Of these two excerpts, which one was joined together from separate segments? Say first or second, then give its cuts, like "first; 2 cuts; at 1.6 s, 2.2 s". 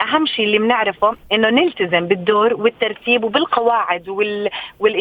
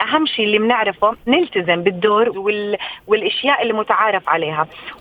second; 2 cuts; at 1.3 s, 2.3 s